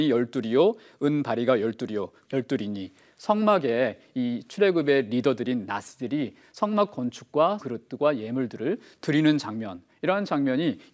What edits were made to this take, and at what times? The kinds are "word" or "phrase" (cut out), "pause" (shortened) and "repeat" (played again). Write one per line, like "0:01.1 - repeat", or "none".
0:02.2 - phrase
0:07.6 - phrase